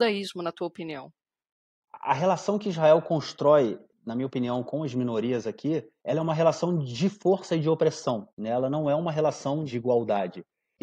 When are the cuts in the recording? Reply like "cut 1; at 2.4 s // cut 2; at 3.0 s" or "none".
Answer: none